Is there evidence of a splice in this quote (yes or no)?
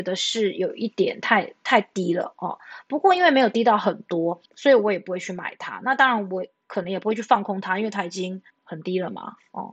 yes